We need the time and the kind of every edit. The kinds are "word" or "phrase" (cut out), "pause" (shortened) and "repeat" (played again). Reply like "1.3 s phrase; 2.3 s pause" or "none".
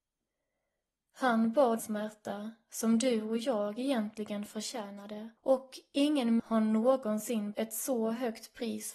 1.8 s word; 5.4 s pause; 6.4 s word; 7.5 s word